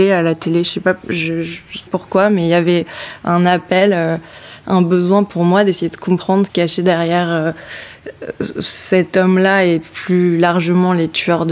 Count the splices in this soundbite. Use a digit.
2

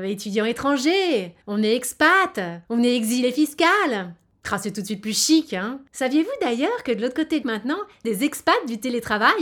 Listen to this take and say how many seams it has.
5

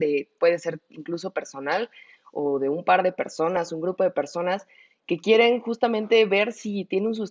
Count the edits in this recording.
0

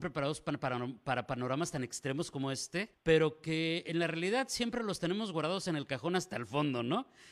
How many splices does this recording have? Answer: 1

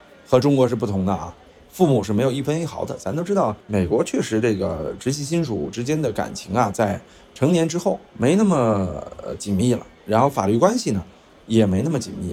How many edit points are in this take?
2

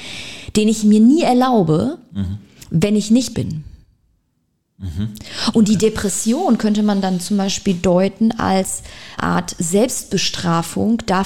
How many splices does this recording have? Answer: 2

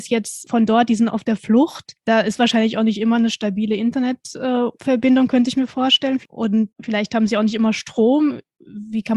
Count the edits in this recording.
0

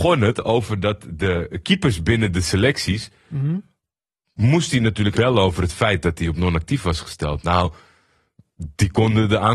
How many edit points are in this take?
1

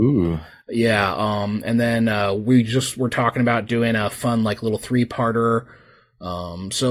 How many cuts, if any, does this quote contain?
0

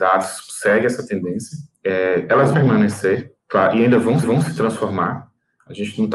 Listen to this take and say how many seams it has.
4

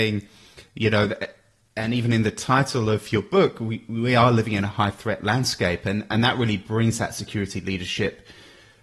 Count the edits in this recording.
0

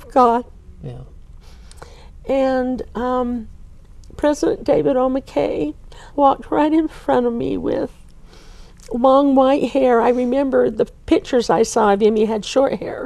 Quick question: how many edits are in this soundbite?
1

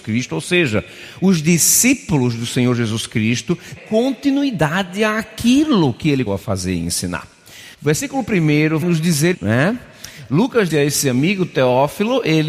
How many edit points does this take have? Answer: 6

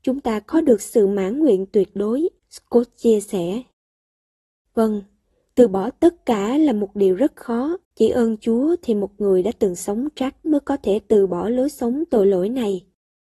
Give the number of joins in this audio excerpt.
3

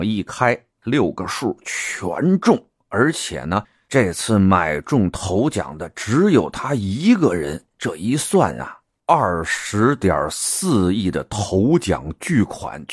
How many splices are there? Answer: 0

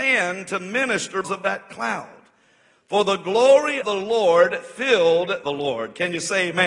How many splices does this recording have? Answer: 3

